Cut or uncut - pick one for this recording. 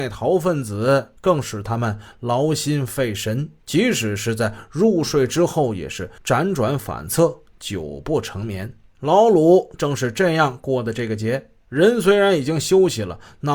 cut